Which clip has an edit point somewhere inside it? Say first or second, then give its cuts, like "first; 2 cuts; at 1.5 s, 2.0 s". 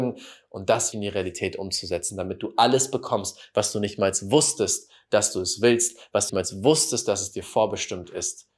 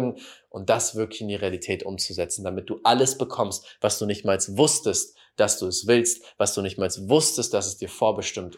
first; 2 cuts; at 0.9 s, 6.3 s